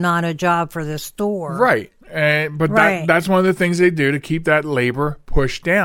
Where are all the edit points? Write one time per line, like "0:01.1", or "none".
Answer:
0:02.0